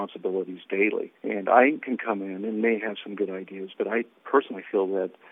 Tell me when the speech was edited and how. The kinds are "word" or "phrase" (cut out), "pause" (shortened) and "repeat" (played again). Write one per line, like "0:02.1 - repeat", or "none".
0:01.2 - pause

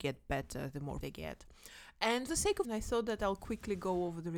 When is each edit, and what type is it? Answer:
0:01.0 - word
0:02.3 - word
0:02.6 - word

